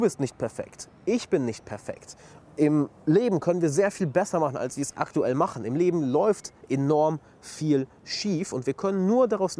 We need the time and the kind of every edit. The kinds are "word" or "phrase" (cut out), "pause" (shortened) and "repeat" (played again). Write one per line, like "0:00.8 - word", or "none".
none